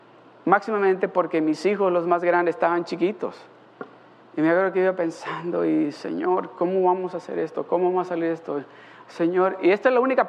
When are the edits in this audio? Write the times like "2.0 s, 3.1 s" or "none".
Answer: none